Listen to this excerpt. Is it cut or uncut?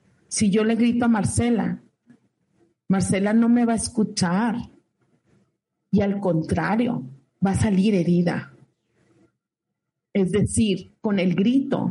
uncut